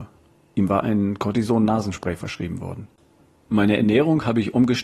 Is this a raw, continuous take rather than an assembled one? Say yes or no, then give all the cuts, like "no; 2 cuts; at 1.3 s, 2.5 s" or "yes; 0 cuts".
yes; 0 cuts